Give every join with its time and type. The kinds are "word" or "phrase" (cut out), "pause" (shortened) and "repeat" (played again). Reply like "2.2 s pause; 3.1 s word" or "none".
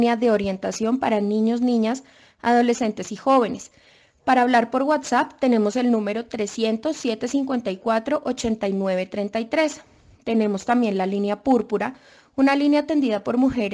none